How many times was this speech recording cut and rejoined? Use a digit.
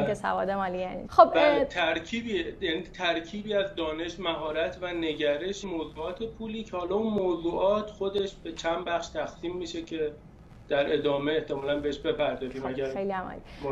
2